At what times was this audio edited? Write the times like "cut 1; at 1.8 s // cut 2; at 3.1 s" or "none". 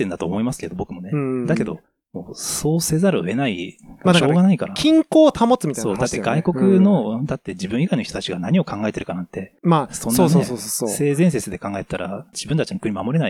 cut 1; at 9.6 s // cut 2; at 12.3 s